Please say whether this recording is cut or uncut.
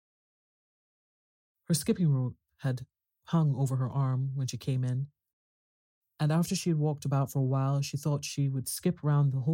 uncut